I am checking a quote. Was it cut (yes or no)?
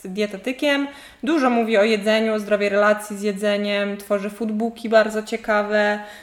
no